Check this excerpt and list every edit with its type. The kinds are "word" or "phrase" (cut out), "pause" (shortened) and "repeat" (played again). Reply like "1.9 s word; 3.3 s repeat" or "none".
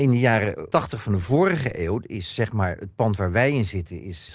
none